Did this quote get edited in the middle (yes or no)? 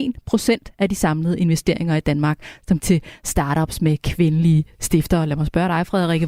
yes